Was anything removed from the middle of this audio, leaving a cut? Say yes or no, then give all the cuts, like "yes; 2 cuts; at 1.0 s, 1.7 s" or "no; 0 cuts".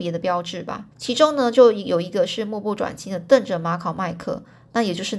yes; 1 cut; at 0.9 s